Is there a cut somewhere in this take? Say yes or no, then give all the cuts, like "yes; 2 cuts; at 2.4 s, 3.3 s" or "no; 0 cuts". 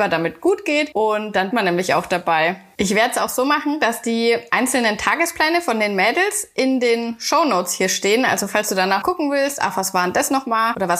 yes; 2 cuts; at 1.5 s, 9.0 s